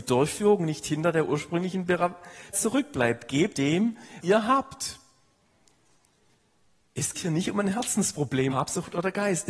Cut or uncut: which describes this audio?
cut